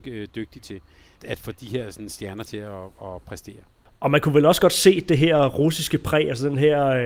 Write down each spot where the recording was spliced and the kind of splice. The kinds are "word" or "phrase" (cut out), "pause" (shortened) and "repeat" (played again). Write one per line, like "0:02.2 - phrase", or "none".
0:01.2 - word